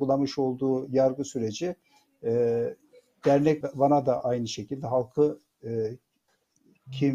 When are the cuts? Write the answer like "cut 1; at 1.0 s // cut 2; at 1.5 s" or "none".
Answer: cut 1; at 3.6 s

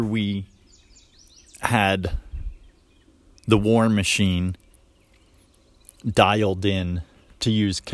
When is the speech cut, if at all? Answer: none

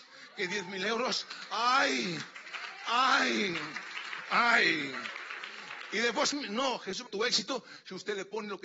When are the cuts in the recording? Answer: cut 1; at 6.3 s // cut 2; at 7.1 s

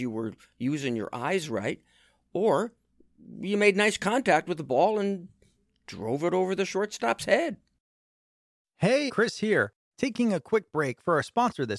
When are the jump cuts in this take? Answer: cut 1; at 9.1 s

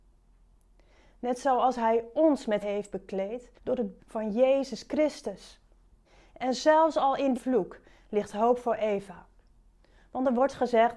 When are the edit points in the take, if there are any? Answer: cut 1; at 2.6 s // cut 2; at 3.6 s // cut 3; at 4.0 s // cut 4; at 6.0 s // cut 5; at 7.3 s

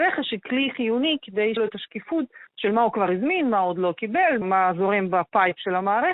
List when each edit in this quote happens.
cut 1; at 1.6 s // cut 2; at 2.5 s // cut 3; at 4.4 s

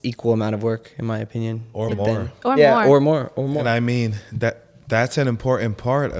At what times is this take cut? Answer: none

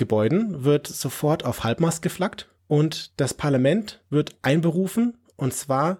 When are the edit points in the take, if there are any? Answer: cut 1; at 2.6 s // cut 2; at 4.1 s

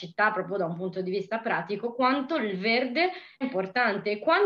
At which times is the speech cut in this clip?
cut 1; at 3.4 s

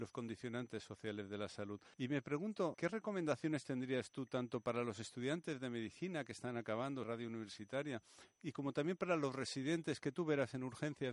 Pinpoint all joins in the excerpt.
cut 1; at 1.9 s // cut 2; at 2.7 s // cut 3; at 7.0 s

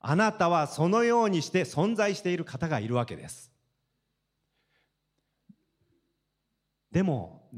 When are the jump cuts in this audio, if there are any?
none

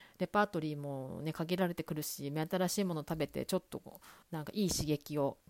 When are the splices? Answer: cut 1; at 4.2 s

